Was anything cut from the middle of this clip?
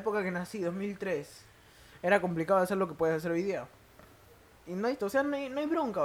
yes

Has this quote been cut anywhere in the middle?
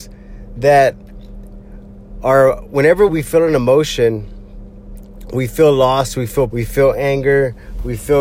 yes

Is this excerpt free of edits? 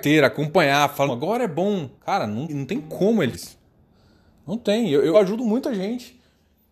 no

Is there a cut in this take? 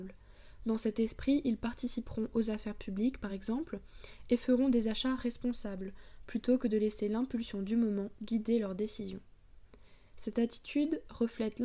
no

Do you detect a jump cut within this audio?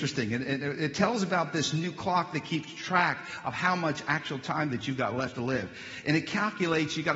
no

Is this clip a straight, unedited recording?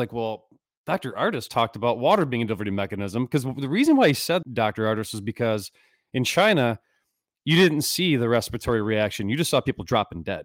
no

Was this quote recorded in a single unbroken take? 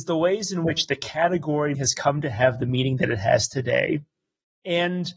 no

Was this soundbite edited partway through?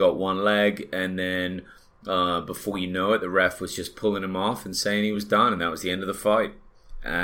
no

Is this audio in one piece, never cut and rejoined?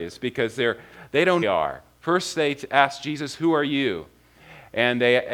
no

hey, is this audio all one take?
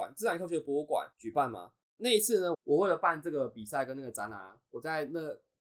no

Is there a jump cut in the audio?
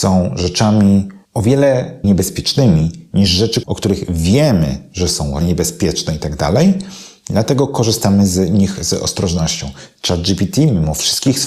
yes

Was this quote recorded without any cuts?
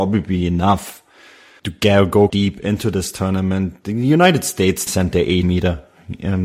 no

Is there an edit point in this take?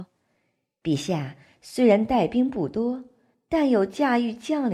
no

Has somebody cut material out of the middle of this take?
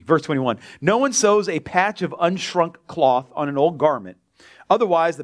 no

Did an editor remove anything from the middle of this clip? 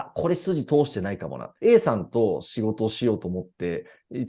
yes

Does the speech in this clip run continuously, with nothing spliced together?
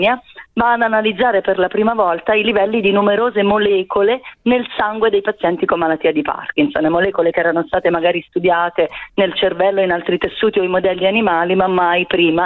yes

